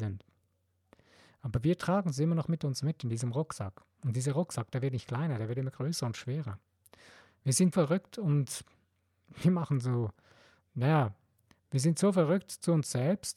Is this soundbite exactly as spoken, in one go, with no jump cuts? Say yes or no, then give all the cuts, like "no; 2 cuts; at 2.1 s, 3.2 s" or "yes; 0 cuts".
no; 1 cut; at 7.7 s